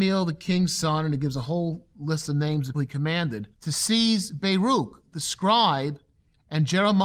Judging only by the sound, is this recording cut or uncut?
cut